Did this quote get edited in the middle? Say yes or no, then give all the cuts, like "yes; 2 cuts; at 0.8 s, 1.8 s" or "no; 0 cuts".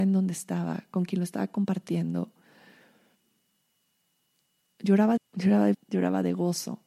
yes; 2 cuts; at 5.2 s, 5.7 s